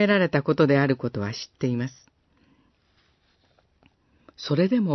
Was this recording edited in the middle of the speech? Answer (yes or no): no